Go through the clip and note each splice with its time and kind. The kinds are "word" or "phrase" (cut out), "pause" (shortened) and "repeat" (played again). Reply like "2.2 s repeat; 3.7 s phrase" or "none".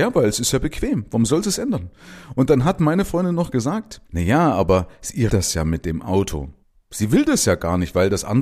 4.1 s pause; 5.3 s word; 6.6 s pause